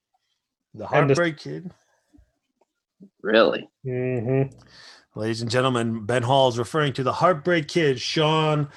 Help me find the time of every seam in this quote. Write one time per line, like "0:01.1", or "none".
0:03.8